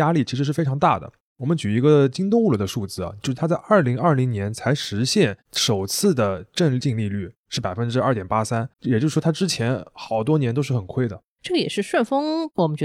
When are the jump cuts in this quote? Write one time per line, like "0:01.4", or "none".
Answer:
0:08.7